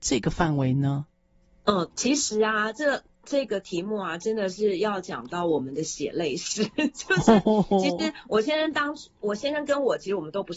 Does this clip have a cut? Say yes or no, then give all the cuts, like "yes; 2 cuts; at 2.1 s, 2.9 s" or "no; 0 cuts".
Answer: yes; 1 cut; at 1.9 s